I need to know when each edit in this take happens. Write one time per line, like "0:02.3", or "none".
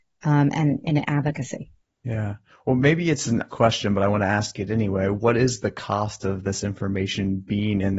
0:01.8
0:03.5